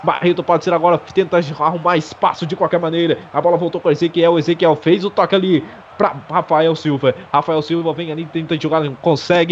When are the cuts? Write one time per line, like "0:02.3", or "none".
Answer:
none